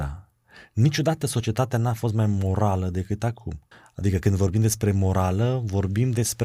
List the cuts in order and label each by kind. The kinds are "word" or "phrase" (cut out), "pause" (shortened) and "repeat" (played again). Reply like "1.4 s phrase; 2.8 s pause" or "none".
3.7 s pause